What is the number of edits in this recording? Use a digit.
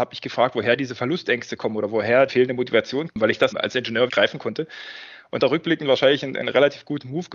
5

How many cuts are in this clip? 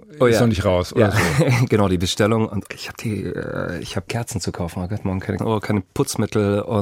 3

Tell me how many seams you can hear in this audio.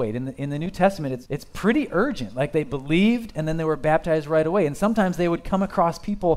1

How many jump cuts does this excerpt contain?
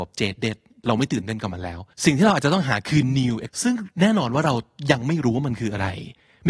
2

